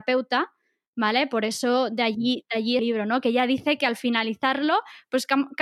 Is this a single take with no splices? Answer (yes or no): no